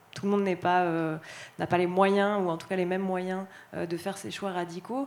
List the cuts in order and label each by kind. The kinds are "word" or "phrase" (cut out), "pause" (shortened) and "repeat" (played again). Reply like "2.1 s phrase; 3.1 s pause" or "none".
none